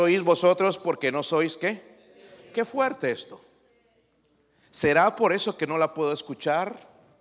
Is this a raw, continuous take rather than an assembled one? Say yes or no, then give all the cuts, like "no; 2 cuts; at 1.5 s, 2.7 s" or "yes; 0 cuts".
yes; 0 cuts